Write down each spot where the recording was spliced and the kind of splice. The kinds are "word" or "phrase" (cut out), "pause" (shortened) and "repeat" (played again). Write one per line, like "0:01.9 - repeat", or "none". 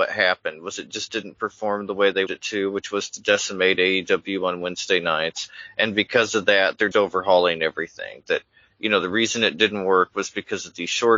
0:02.3 - word
0:06.9 - word